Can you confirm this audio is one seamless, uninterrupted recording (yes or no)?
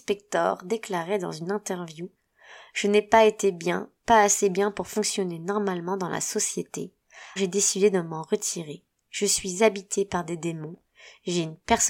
no